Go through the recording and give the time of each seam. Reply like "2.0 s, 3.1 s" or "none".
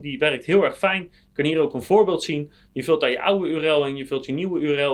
none